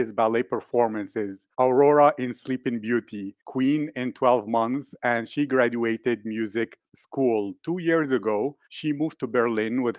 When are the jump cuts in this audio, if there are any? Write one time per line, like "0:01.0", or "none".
0:01.5
0:03.4
0:06.9
0:08.6